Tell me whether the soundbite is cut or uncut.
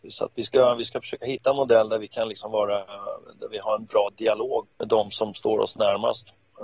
cut